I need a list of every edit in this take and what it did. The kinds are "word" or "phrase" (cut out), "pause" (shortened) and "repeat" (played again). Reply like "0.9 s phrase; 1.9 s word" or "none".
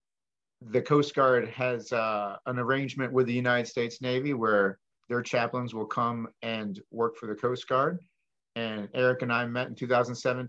none